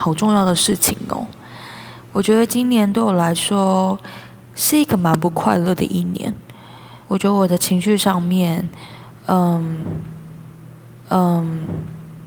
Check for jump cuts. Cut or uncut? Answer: cut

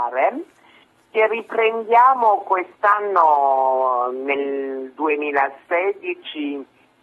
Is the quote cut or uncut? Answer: uncut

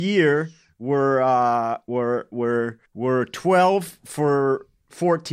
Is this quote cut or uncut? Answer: cut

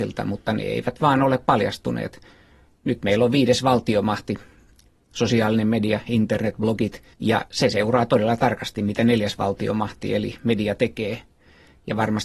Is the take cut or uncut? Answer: cut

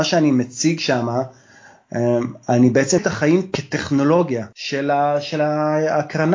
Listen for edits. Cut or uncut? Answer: cut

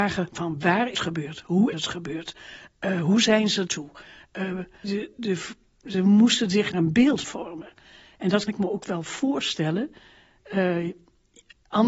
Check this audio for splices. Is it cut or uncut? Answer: cut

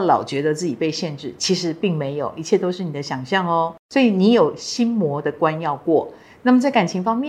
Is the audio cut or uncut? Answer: uncut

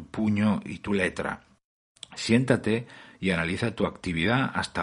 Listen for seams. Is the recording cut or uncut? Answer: uncut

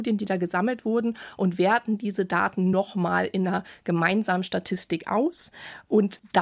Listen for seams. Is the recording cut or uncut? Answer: uncut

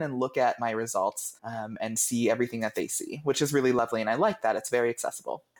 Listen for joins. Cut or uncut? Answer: cut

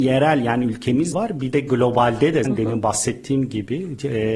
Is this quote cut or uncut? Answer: cut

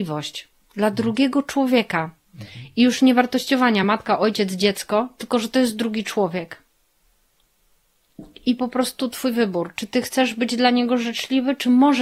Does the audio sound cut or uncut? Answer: uncut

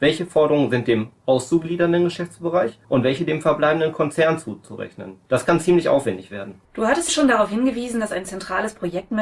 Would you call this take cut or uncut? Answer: cut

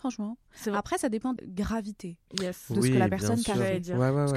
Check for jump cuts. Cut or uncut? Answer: cut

